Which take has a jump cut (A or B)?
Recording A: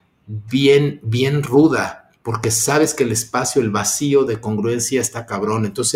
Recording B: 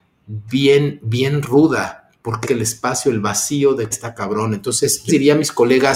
B